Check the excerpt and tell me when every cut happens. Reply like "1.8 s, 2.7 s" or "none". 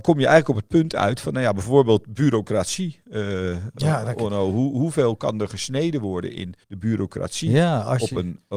6.6 s